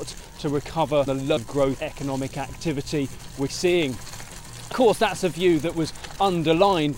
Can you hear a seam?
yes; 5 cuts; at 1.1 s, 1.4 s, 1.8 s, 3.5 s, 4.7 s

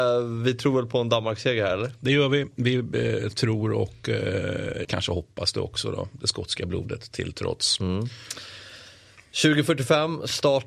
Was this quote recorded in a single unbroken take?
no; 1 cut; at 4.8 s

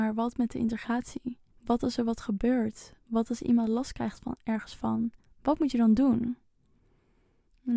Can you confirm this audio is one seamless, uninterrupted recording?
no; 2 cuts; at 1.5 s, 5.2 s

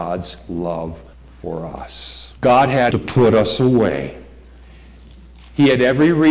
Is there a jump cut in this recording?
yes; 3 cuts; at 1.1 s, 2.4 s, 2.9 s

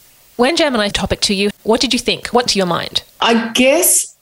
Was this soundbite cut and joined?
yes; 4 cuts; at 0.9 s, 1.5 s, 2.5 s, 3.1 s

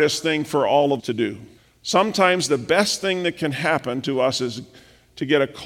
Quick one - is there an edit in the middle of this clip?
yes; 2 cuts; at 1.0 s, 1.6 s

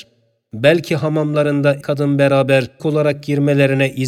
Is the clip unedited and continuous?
no; 2 cuts; at 1.8 s, 2.8 s

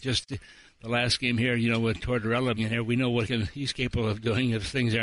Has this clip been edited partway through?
yes; 2 cuts; at 2.6 s, 3.2 s

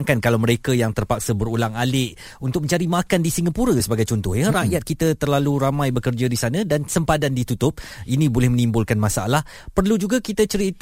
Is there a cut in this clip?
no; 0 cuts

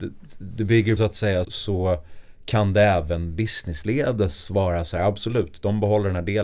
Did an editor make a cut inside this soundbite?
yes; 2 cuts; at 1.0 s, 1.4 s

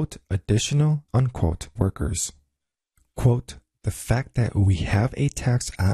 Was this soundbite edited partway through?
yes; 2 cuts; at 1.1 s, 1.8 s

